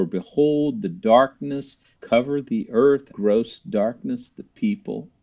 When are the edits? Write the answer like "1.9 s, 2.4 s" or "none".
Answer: 2.0 s, 3.1 s